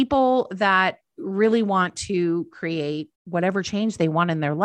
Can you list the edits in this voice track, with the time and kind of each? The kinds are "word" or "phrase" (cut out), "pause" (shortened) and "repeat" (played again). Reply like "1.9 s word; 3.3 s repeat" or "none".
3.2 s pause